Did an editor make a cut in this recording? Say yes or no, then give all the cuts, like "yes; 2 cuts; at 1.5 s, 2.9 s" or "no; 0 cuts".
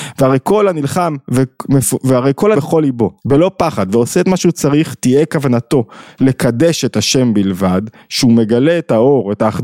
yes; 2 cuts; at 2.5 s, 3.2 s